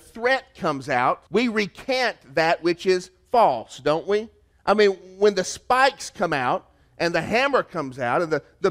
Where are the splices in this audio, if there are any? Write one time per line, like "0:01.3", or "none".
0:01.3
0:04.5